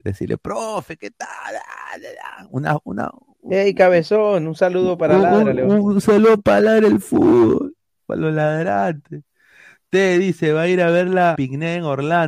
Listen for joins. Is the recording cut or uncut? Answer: cut